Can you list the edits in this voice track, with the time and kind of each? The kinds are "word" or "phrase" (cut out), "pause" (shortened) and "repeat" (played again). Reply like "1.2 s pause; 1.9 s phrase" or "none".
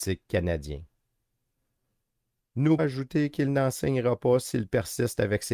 2.8 s word